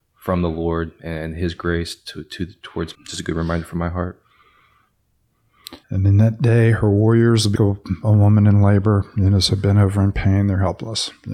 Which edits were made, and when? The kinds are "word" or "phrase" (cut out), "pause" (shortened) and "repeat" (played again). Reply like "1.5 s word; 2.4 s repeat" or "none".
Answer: 2.9 s phrase; 5.8 s pause; 7.6 s word

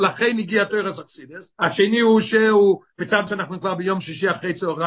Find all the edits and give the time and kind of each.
1.5 s pause; 3.3 s word

